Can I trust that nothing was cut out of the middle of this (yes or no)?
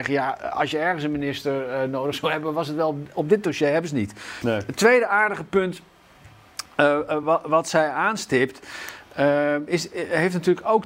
yes